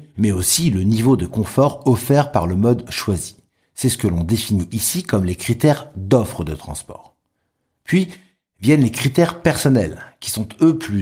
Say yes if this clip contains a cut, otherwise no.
no